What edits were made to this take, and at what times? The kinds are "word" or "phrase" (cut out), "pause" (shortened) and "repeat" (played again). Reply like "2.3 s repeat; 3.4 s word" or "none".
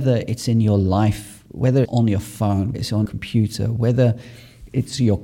1.9 s word; 2.7 s word; 3.1 s word